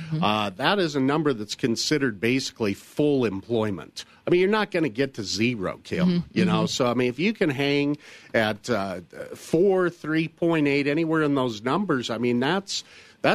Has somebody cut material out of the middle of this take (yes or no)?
no